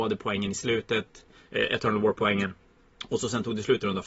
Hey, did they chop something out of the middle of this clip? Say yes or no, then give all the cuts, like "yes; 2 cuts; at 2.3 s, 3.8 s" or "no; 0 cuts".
no; 0 cuts